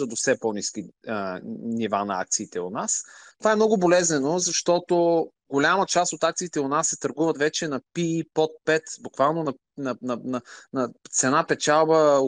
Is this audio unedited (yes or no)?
yes